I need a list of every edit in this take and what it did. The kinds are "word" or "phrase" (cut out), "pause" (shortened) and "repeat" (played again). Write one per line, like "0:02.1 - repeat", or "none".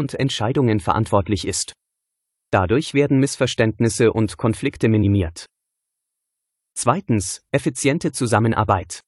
none

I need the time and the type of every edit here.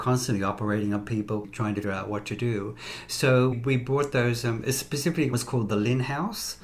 0:01.4 - word
0:01.8 - word
0:03.5 - word
0:05.3 - word

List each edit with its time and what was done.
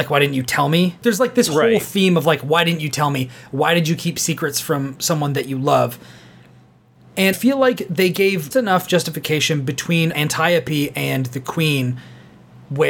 0:01.0 - word
0:07.3 - word
0:08.5 - word
0:10.1 - word

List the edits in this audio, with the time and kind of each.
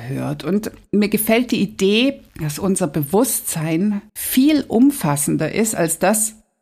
0:02.3 - pause
0:04.1 - pause

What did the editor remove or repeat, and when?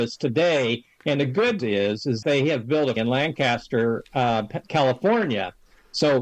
0:01.6 - word
0:02.2 - word
0:03.0 - word
0:04.6 - word

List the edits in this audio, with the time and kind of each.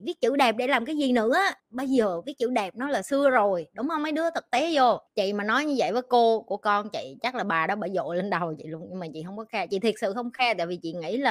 0:01.6 - pause
0:05.1 - pause

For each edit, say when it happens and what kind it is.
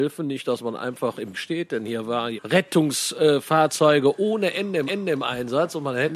0:01.3 - word
0:02.4 - word
0:04.9 - repeat

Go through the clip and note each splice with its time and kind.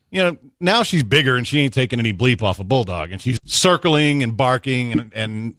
0:03.4 - word

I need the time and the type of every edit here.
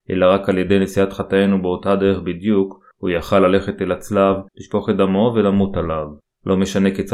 0:02.9 - pause
0:04.5 - pause
0:06.2 - pause

